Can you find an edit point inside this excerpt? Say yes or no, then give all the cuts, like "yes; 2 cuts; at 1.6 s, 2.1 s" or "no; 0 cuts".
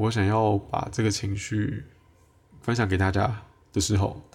no; 0 cuts